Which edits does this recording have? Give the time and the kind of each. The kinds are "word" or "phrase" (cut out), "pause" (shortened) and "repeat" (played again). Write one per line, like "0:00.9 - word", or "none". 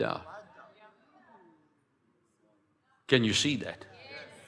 none